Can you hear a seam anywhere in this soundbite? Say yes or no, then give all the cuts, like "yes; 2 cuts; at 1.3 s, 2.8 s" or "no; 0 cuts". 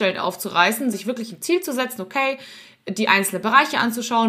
yes; 1 cut; at 0.9 s